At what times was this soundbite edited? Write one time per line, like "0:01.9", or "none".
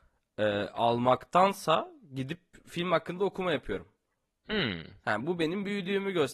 none